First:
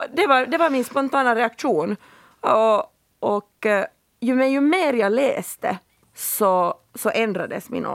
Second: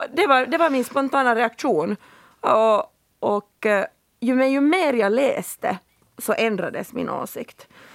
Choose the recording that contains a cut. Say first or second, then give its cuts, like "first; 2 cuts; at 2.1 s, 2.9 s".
second; 1 cut; at 6.1 s